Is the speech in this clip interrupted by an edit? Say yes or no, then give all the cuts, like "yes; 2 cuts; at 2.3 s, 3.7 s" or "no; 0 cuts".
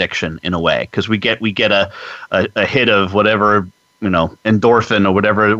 no; 0 cuts